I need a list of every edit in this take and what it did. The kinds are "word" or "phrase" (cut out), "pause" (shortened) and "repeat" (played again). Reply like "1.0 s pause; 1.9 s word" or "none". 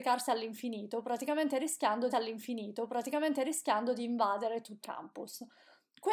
2.1 s repeat; 4.8 s word